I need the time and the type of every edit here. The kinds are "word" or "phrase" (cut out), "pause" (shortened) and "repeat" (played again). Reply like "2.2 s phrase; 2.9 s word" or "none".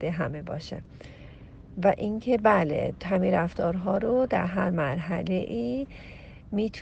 none

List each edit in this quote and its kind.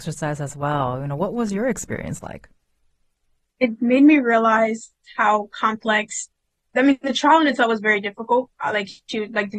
none

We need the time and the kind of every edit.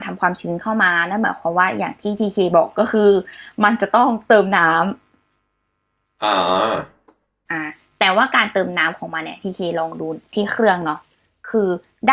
none

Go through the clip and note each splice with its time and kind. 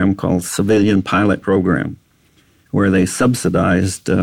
1.4 s word

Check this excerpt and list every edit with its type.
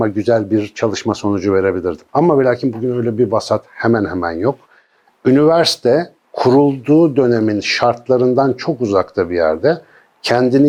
2.1 s pause; 6.2 s pause

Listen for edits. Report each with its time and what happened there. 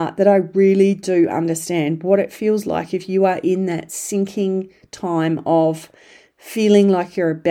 none

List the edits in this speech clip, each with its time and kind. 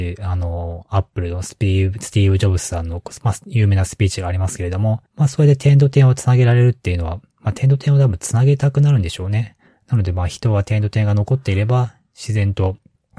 5.1 s pause

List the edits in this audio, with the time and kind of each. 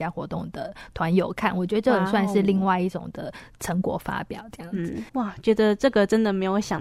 5.1 s pause

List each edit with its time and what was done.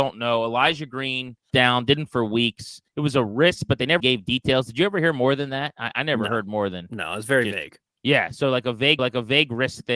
1.5 s phrase; 2.1 s word; 2.9 s pause; 4.0 s word; 9.0 s repeat

